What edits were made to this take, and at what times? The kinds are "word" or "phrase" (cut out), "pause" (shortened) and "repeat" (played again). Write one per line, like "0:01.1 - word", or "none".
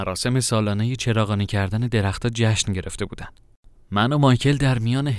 none